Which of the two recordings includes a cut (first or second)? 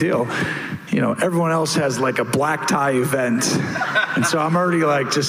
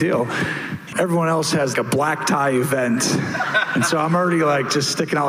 second